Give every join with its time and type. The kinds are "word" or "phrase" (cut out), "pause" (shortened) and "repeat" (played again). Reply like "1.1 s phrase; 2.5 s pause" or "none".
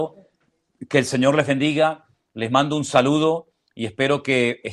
none